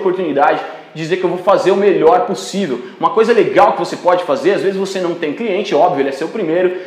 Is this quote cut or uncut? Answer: uncut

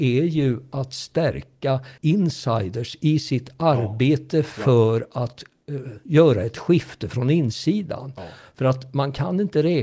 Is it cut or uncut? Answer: cut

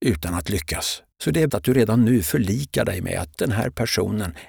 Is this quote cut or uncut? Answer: cut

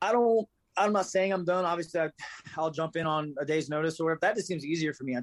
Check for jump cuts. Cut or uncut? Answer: uncut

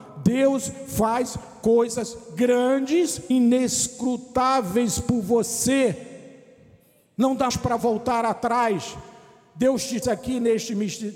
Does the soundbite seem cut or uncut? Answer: cut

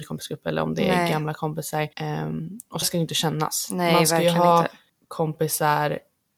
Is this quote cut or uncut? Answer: cut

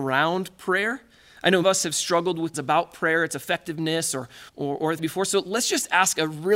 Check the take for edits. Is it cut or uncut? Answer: cut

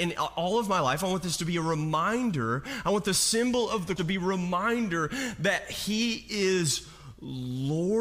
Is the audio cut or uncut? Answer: cut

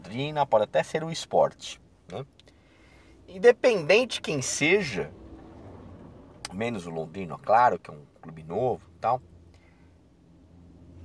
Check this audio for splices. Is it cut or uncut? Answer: cut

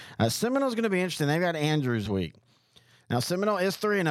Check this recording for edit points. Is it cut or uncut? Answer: cut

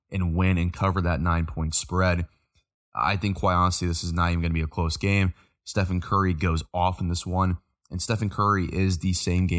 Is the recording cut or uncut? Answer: uncut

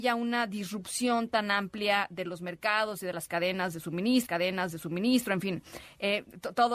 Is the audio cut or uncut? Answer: cut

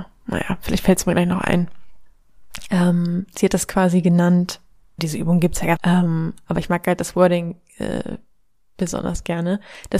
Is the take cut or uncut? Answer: cut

